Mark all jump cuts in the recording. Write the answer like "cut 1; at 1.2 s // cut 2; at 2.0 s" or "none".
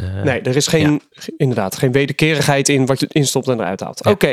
cut 1; at 3.0 s